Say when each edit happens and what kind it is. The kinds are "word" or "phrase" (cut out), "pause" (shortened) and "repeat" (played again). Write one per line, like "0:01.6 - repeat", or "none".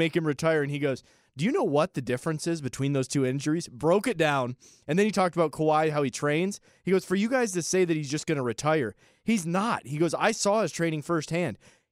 none

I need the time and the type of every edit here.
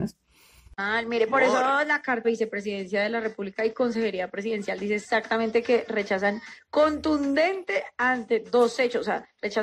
0:02.2 - phrase

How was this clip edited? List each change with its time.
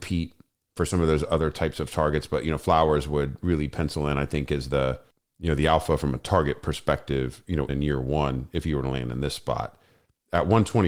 0:05.1 - pause
0:07.7 - word

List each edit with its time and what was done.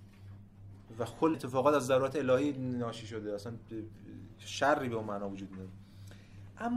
0:01.3 - word

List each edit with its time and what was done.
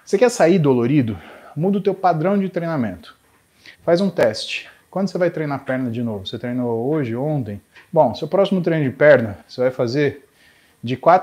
0:03.7 - pause
0:04.8 - pause
0:07.7 - pause
0:09.4 - pause

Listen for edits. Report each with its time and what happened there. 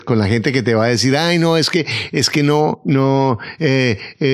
none

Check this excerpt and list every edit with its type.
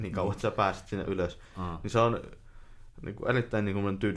none

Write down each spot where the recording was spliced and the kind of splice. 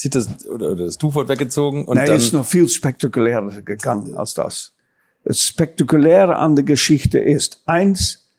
none

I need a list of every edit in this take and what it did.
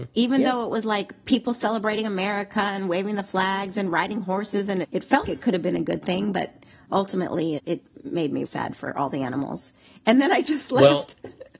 0:04.8 - word
0:05.2 - word
0:07.6 - word
0:08.4 - word

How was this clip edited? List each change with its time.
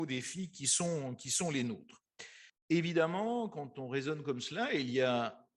0:02.5 - pause

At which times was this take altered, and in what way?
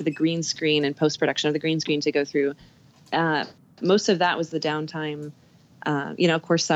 none

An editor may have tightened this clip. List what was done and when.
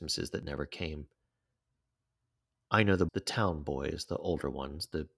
0:03.1 - word

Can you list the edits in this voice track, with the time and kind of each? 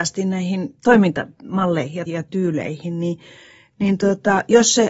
0:02.1 - word

